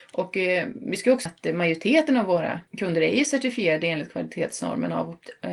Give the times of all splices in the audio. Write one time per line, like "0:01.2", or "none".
0:01.3
0:02.7